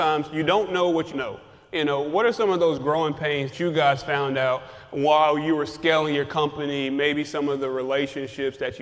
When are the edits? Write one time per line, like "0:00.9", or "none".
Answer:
0:01.1
0:03.5